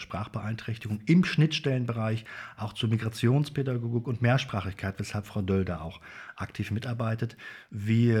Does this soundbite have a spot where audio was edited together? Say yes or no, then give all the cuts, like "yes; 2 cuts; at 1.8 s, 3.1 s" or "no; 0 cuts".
no; 0 cuts